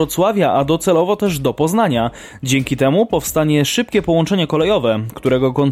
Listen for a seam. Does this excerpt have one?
no; 0 cuts

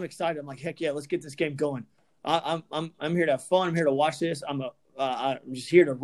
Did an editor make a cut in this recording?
no; 0 cuts

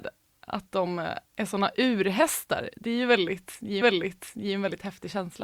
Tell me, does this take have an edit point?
yes; 2 cuts; at 1.3 s, 3.8 s

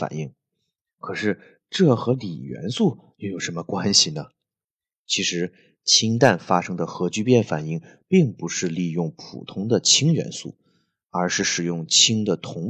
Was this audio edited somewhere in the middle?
no; 0 cuts

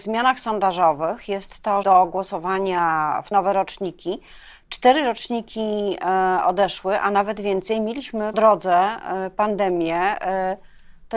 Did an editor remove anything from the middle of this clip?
yes; 3 cuts; at 1.8 s, 3.3 s, 8.3 s

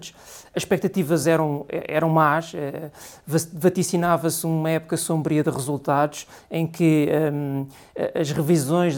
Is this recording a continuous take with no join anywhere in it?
yes; 0 cuts

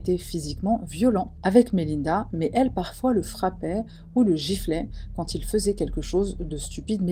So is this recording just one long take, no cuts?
yes; 0 cuts

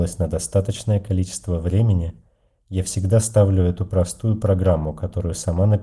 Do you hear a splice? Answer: no; 0 cuts

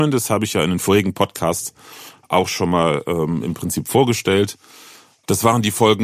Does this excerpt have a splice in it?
no; 0 cuts

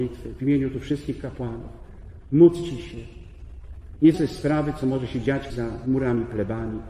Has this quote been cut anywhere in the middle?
yes; 2 cuts; at 4.1 s, 5.5 s

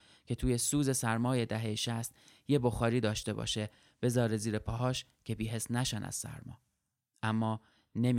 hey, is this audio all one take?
yes; 0 cuts

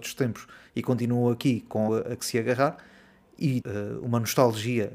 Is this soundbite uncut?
no; 2 cuts; at 1.9 s, 3.6 s

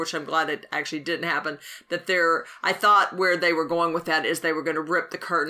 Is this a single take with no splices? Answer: yes; 0 cuts

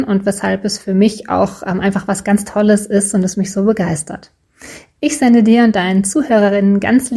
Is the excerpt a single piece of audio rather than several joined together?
yes; 0 cuts

